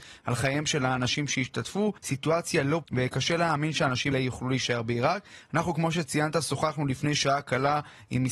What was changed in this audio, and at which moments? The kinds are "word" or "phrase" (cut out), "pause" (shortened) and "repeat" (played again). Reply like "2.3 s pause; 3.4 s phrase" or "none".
2.0 s pause; 2.8 s word; 4.1 s word